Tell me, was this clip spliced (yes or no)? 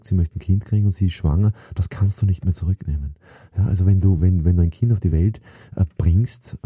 no